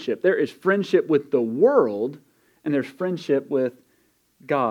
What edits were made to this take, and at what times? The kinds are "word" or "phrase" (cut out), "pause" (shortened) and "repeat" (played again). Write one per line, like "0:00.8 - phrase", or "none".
none